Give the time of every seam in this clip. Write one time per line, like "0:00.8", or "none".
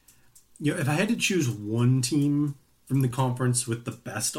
none